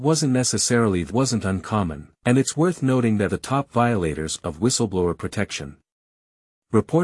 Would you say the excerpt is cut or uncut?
cut